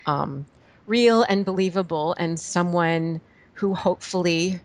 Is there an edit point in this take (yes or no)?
no